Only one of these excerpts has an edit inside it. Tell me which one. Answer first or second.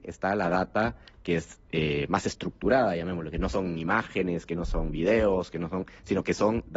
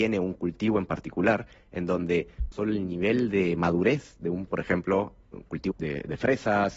second